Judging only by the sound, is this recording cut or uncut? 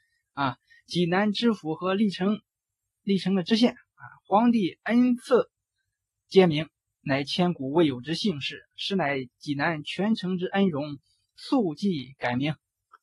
uncut